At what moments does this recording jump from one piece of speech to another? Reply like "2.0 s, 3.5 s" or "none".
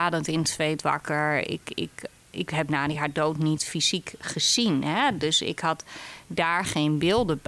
none

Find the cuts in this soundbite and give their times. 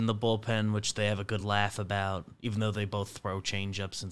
none

